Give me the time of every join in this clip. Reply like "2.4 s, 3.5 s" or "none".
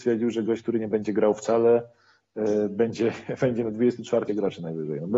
4.3 s